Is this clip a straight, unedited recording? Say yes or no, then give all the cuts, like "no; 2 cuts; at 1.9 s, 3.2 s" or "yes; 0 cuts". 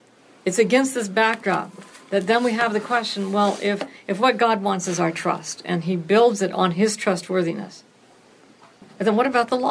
yes; 0 cuts